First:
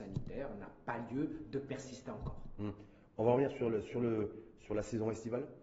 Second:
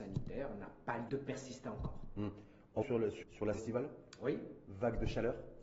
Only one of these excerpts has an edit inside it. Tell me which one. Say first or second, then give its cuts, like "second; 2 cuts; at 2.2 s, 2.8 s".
second; 4 cuts; at 1.1 s, 2.8 s, 3.2 s, 3.5 s